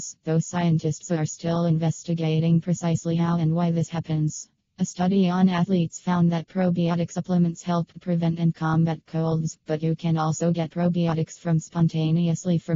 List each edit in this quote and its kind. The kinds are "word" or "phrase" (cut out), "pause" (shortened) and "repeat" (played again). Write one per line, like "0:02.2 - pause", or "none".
none